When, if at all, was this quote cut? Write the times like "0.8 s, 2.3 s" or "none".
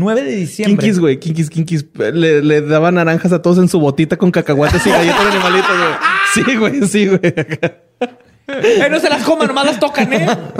none